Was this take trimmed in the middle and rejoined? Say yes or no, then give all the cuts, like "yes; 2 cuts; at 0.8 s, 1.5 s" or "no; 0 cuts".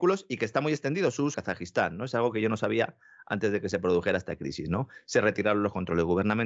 yes; 1 cut; at 1.3 s